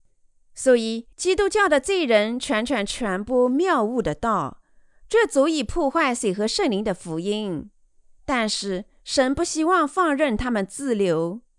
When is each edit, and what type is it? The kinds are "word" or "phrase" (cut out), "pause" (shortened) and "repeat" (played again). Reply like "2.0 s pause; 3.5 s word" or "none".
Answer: 1.1 s pause